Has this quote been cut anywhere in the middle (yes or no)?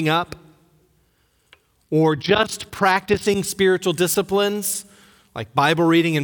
no